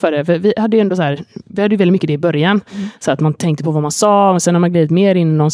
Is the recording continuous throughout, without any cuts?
yes; 0 cuts

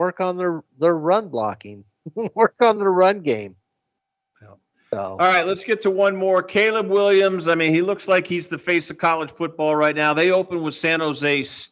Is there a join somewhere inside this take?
no; 0 cuts

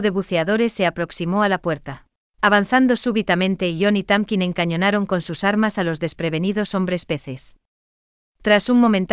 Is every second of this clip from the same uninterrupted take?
no; 1 cut; at 2.3 s

